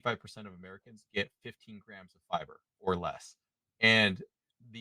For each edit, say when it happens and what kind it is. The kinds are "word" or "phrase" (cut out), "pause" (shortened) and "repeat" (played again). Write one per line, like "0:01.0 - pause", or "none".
none

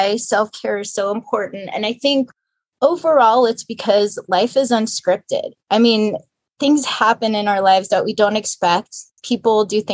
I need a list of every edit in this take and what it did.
0:05.6 - pause

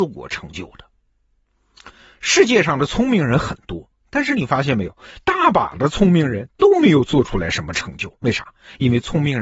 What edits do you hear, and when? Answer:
0:08.2 - pause

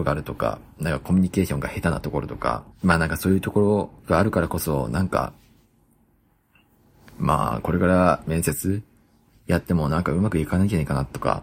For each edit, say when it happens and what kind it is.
0:02.7 - pause
0:04.0 - pause

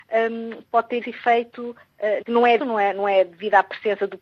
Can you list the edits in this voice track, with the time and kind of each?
0:01.0 - word
0:02.2 - word
0:02.6 - word

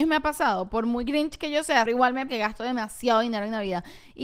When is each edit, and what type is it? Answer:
0:01.9 - word
0:02.3 - word

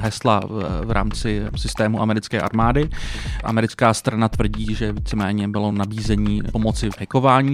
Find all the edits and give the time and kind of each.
none

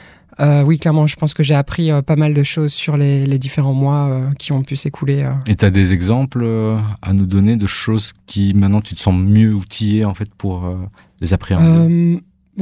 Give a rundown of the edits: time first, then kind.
0:11.0 - pause

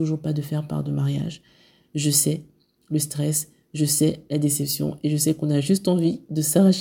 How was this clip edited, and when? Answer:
none

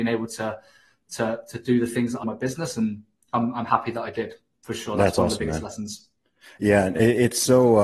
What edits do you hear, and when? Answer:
0:02.2 - phrase

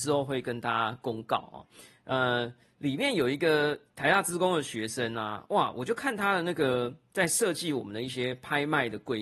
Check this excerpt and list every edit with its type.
none

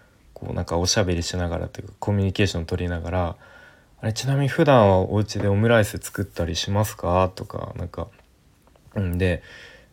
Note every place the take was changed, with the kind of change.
none

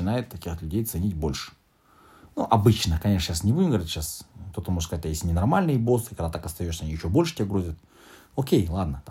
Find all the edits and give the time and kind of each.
none

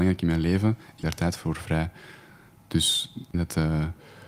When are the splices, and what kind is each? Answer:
0:01.0 - word
0:03.3 - word

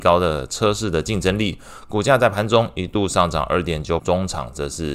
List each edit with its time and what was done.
0:04.0 - word

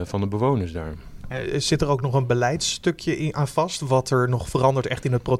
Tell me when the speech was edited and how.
none

